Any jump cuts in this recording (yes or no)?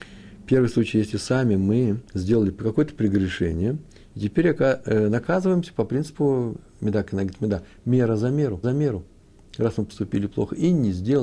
yes